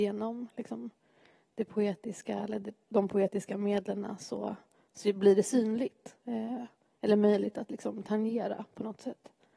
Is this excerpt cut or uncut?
uncut